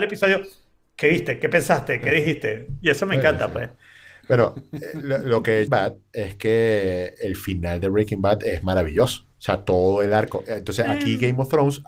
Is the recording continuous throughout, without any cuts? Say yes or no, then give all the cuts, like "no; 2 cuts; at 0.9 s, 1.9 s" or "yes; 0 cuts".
no; 2 cuts; at 5.7 s, 9.3 s